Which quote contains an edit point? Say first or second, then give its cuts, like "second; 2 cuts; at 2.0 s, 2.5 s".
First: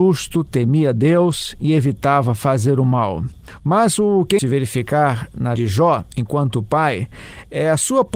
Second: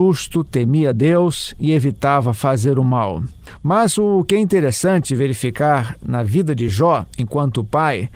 first; 2 cuts; at 4.4 s, 5.6 s